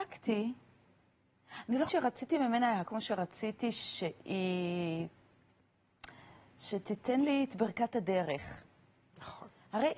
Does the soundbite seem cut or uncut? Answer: cut